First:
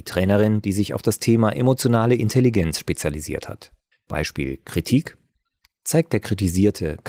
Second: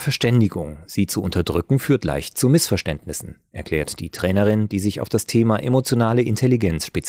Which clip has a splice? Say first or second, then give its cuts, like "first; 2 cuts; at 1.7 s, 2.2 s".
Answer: first; 1 cut; at 3.9 s